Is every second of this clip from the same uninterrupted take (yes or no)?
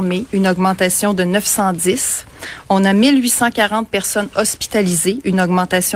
yes